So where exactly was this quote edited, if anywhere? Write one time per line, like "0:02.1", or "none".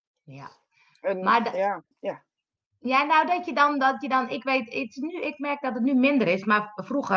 0:01.9